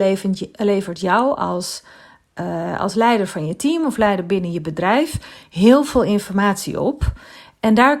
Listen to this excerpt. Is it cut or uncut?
uncut